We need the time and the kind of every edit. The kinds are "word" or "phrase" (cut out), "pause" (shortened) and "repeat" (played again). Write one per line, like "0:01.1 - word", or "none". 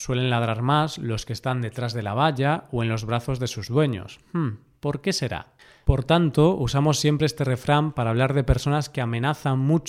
none